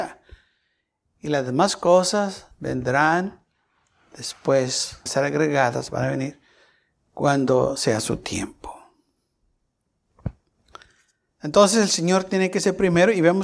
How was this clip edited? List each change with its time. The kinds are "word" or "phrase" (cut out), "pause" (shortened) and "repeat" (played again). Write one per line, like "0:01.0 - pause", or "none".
0:02.5 - pause
0:05.1 - phrase